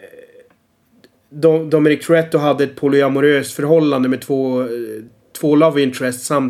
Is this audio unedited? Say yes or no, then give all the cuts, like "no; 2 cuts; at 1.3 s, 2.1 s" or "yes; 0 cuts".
yes; 0 cuts